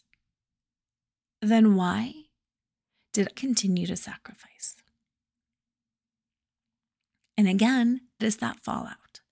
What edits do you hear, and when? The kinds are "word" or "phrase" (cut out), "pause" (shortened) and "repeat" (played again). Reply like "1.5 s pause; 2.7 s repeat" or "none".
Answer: 3.3 s word; 8.2 s word